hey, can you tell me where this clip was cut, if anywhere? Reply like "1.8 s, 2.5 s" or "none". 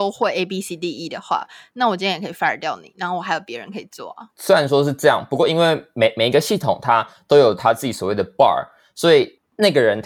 none